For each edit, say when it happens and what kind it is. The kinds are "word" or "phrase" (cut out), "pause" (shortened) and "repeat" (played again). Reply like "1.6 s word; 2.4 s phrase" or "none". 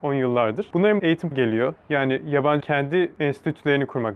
1.0 s word; 1.3 s word; 2.6 s word

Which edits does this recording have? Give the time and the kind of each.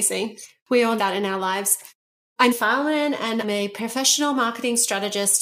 1.0 s word; 2.5 s word; 3.4 s word

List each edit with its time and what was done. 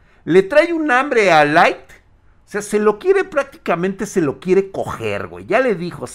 none

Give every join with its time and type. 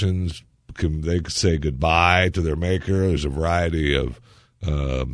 none

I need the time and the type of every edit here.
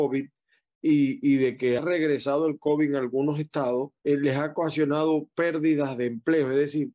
1.8 s word; 4.0 s pause

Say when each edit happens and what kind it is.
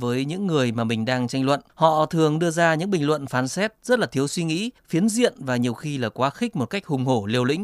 1.7 s pause; 4.8 s pause

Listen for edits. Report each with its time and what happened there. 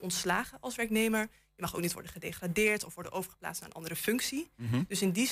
none

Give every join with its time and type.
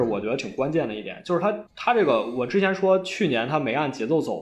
1.7 s pause

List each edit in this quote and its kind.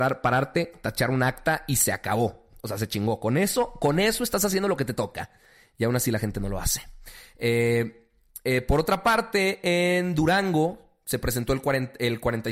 none

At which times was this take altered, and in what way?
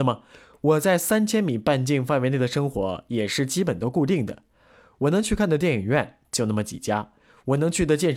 none

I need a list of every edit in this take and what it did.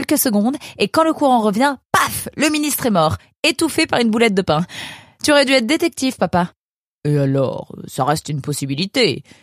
none

